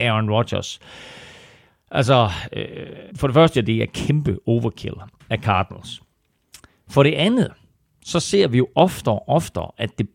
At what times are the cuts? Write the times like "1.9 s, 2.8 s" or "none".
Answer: 3.1 s, 3.5 s